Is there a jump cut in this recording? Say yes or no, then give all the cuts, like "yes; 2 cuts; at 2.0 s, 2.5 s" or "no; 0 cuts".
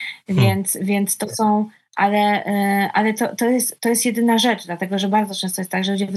no; 0 cuts